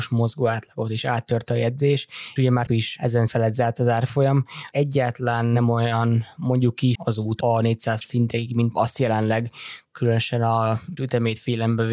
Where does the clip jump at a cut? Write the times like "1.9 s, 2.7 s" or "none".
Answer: 2.4 s, 2.7 s, 3.3 s, 4.7 s, 7.0 s, 8.0 s, 8.7 s, 11.0 s